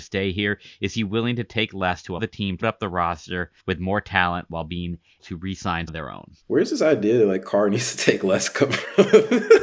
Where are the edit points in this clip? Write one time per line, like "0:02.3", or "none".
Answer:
0:02.2
0:02.6
0:03.6
0:05.2
0:05.9
0:06.4